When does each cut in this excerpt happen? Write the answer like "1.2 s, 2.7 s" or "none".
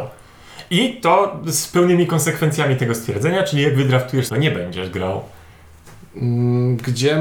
4.3 s